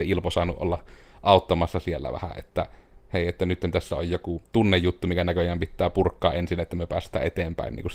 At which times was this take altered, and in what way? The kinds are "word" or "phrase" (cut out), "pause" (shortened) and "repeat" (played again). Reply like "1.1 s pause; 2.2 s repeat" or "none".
none